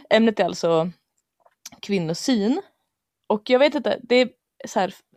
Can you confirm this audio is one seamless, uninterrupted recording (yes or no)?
yes